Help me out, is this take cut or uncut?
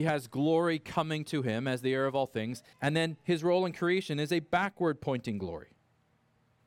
cut